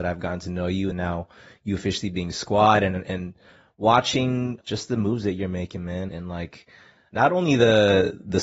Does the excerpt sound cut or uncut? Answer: cut